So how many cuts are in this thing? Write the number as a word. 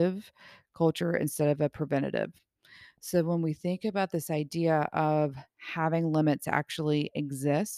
zero